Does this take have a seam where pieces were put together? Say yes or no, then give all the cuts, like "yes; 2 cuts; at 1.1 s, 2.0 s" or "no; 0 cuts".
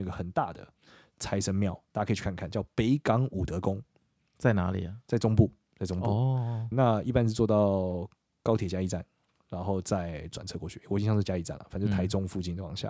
yes; 1 cut; at 6.7 s